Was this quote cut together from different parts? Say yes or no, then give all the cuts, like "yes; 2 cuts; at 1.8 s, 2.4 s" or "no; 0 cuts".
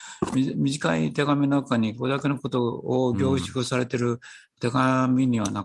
no; 0 cuts